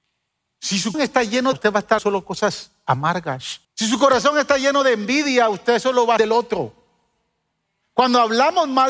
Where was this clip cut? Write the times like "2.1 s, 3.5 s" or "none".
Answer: 0.9 s, 1.5 s, 2.0 s, 3.6 s, 6.2 s